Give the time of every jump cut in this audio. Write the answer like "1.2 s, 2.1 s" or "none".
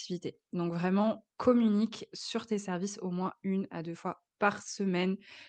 1.3 s